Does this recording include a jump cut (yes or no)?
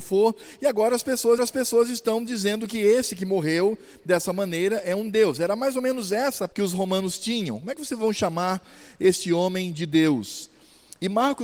yes